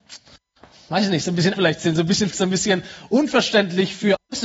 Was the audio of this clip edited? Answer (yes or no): yes